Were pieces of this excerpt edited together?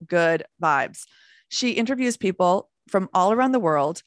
no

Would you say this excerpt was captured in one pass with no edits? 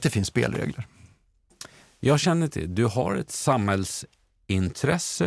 yes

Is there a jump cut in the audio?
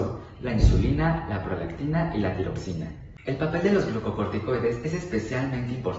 no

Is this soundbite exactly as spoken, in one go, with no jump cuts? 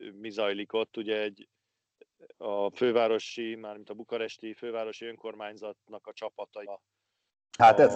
no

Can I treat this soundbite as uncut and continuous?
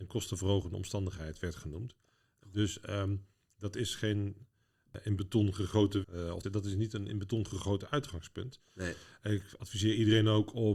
no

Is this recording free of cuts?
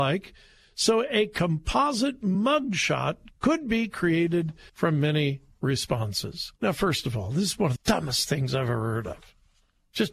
no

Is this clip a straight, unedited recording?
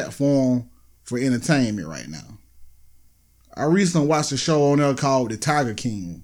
yes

